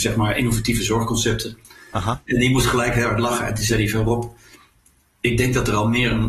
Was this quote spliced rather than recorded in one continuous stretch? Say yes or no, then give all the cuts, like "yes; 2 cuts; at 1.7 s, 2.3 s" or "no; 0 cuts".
no; 0 cuts